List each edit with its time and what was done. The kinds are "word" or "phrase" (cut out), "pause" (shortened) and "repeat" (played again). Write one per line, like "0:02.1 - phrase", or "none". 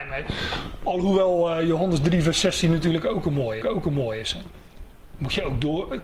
0:03.6 - repeat